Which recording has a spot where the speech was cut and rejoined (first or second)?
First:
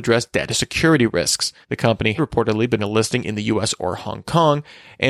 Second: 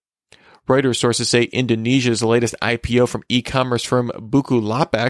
first